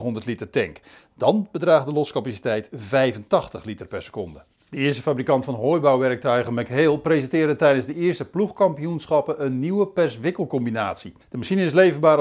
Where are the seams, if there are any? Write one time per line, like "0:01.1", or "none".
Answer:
0:11.2